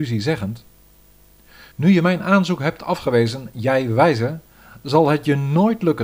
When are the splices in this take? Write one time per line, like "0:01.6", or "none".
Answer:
0:01.7